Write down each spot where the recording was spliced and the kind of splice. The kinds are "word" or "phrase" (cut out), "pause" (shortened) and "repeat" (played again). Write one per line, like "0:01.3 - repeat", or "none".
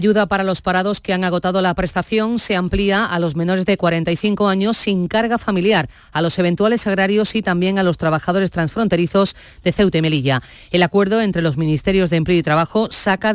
none